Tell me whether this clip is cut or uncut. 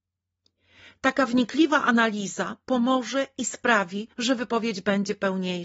cut